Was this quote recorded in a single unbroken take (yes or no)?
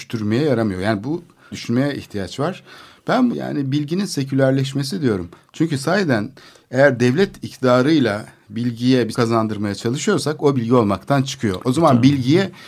no